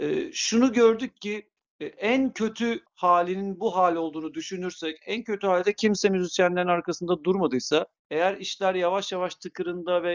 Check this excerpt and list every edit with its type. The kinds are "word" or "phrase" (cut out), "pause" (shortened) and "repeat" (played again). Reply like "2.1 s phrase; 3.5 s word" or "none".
1.6 s pause; 2.9 s pause; 8.0 s pause